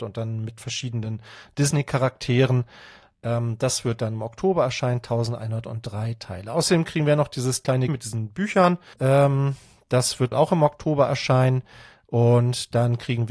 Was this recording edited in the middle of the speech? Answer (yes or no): yes